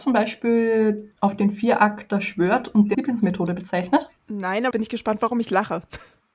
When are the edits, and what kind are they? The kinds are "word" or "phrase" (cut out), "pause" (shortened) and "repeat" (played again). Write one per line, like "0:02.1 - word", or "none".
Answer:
0:02.9 - word
0:04.2 - pause
0:04.7 - word